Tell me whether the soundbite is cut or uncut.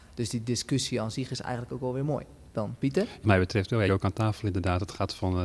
cut